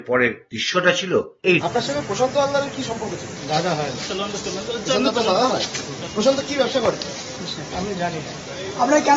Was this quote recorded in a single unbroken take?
no; 1 cut; at 1.6 s

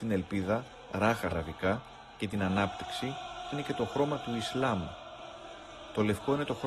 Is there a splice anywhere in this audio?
yes; 2 cuts; at 1.3 s, 3.5 s

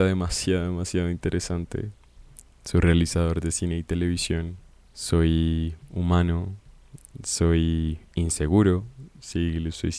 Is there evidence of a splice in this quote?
yes; 1 cut; at 4.9 s

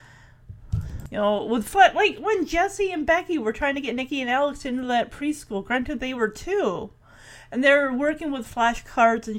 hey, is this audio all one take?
yes; 0 cuts

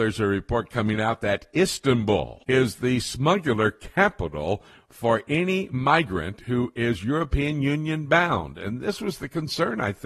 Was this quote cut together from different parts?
no; 0 cuts

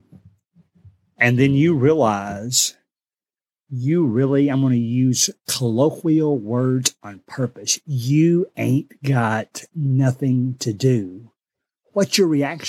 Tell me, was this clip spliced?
no; 0 cuts

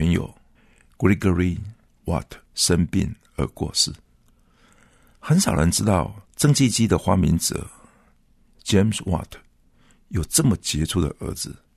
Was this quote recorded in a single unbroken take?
no; 2 cuts; at 2.5 s, 6.3 s

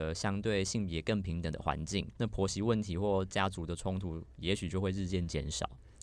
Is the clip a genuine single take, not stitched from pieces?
no; 1 cut; at 2.2 s

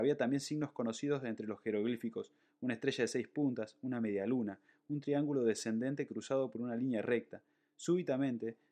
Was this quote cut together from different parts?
no; 0 cuts

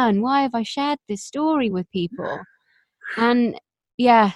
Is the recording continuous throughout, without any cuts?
yes; 0 cuts

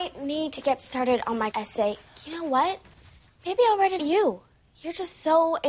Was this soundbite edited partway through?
yes; 2 cuts; at 1.5 s, 4.0 s

